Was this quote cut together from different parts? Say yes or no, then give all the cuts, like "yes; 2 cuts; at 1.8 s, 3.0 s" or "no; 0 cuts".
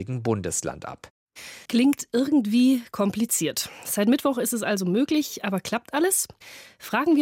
yes; 1 cut; at 1.7 s